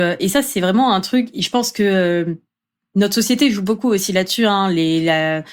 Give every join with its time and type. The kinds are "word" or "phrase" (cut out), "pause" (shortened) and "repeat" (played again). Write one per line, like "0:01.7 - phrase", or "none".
none